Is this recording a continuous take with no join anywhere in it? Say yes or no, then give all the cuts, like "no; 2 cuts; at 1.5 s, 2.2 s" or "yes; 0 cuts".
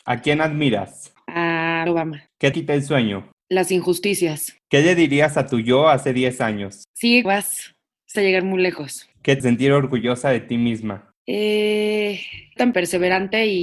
no; 6 cuts; at 1.9 s, 2.5 s, 7.2 s, 8.1 s, 9.4 s, 12.6 s